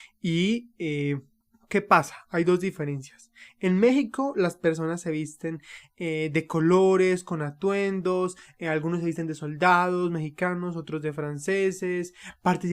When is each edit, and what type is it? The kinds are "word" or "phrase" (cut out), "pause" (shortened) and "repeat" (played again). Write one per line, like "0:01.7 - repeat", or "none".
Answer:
0:01.4 - pause